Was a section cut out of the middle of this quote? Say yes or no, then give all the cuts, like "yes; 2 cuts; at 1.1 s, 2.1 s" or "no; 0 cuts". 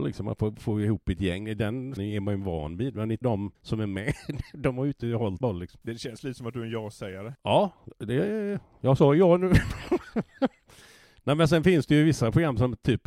yes; 4 cuts; at 2.0 s, 3.2 s, 3.5 s, 5.4 s